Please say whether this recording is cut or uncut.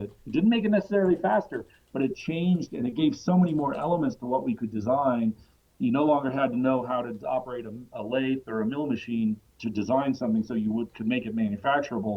uncut